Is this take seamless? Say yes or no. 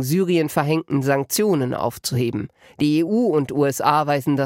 yes